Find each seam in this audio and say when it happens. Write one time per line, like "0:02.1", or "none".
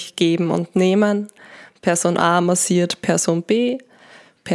none